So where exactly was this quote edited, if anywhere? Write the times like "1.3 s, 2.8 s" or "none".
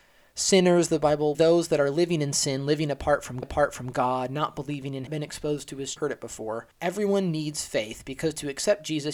1.3 s, 3.4 s, 5.1 s, 6.0 s, 6.7 s